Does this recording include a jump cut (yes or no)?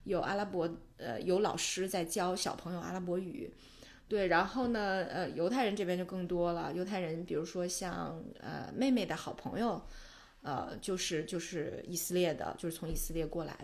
no